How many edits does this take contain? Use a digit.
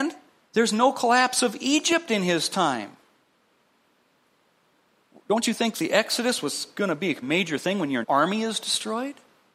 2